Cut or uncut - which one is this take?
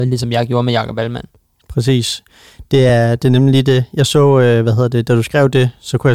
uncut